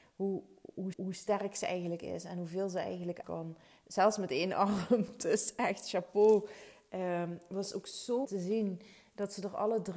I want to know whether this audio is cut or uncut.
cut